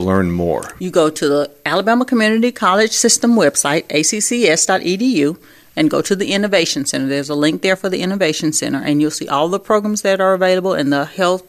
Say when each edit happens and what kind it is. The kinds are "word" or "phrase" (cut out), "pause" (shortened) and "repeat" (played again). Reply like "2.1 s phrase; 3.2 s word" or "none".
none